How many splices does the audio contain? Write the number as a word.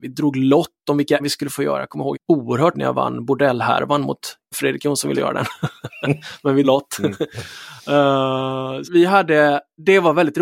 seven